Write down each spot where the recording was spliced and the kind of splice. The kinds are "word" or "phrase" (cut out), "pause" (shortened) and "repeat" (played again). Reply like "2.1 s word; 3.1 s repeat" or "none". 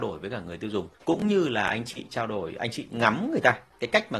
0.9 s pause